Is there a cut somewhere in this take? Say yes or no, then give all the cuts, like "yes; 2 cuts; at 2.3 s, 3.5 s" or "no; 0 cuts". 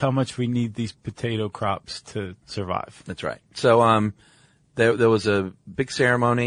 no; 0 cuts